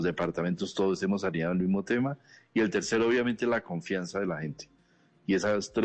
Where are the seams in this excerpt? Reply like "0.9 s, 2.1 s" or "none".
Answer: none

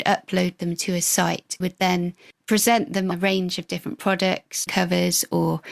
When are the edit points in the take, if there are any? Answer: 1.6 s, 3.1 s, 4.7 s

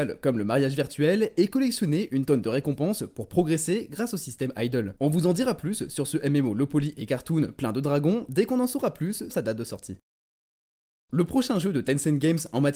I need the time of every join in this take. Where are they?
9.3 s

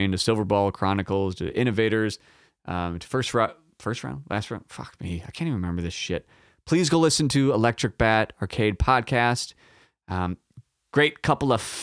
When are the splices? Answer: none

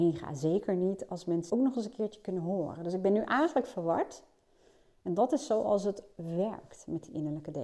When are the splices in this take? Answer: 1.5 s

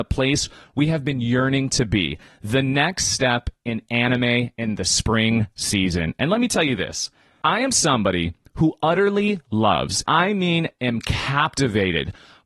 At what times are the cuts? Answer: 10.1 s

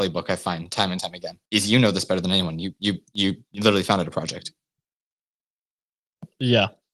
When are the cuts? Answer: 1.5 s

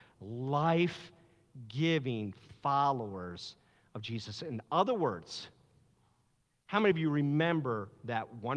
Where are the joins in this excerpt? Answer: none

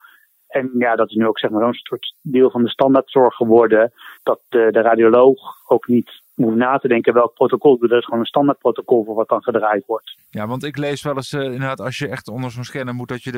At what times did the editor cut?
4.2 s

